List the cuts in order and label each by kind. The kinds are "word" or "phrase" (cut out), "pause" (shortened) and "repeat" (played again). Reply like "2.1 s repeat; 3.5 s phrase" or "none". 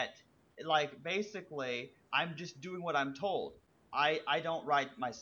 none